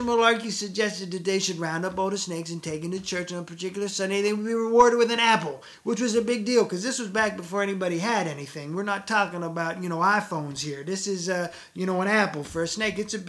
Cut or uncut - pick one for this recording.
uncut